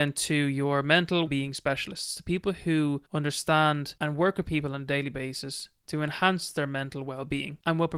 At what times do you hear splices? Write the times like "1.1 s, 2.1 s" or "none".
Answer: 1.3 s, 3.1 s

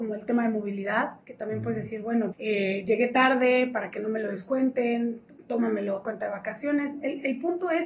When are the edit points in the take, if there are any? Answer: 2.3 s

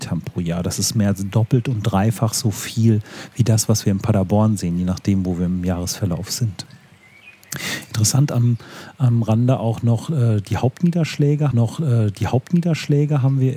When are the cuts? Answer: 11.5 s

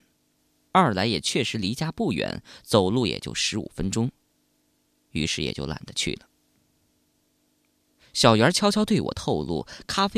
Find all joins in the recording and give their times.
none

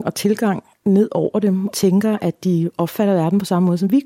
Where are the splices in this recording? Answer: 1.7 s

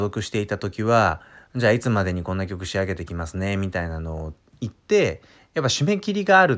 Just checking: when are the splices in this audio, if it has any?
none

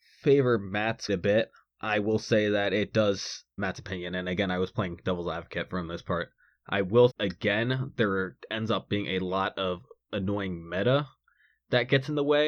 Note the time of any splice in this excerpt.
1.1 s, 3.6 s, 7.1 s

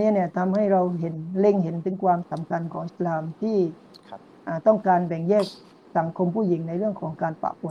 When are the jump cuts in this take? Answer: none

